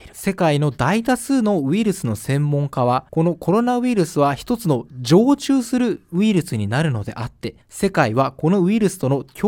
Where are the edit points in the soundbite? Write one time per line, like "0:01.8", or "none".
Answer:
0:03.1
0:07.6